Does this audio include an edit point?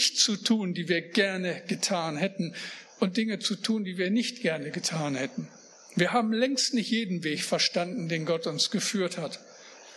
yes; 1 cut; at 5.7 s

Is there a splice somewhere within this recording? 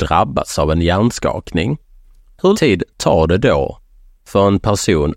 yes; 1 cut; at 2.5 s

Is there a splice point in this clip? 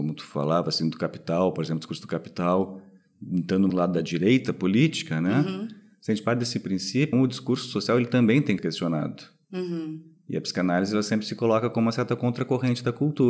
yes; 3 cuts; at 3.7 s, 7.1 s, 8.6 s

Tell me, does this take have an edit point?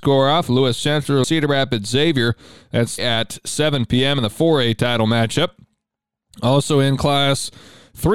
yes; 2 cuts; at 1.2 s, 3.0 s

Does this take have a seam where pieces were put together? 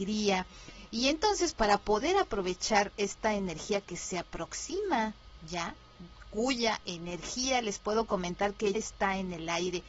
yes; 2 cuts; at 1.5 s, 8.7 s

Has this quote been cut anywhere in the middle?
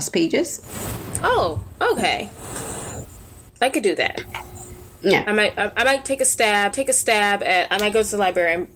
yes; 2 cuts; at 3.5 s, 6.7 s

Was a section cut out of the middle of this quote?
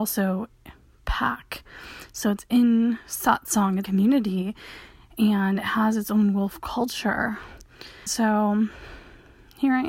yes; 2 cuts; at 3.8 s, 8.1 s

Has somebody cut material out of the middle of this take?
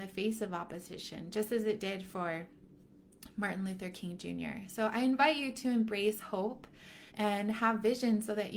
yes; 1 cut; at 7.1 s

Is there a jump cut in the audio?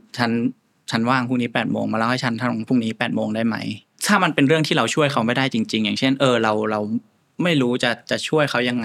no; 0 cuts

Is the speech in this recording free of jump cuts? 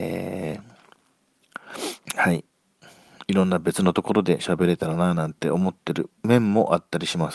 no; 2 cuts; at 2.0 s, 6.2 s

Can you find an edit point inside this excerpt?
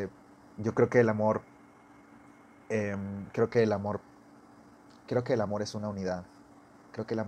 no; 0 cuts

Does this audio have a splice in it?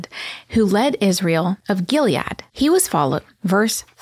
no; 0 cuts

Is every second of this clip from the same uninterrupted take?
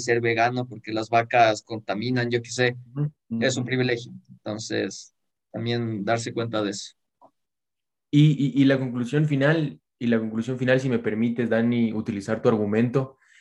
yes; 0 cuts

